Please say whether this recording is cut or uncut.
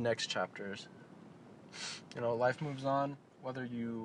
uncut